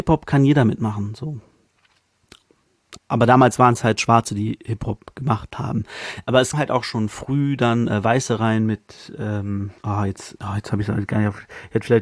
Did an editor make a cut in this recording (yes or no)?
yes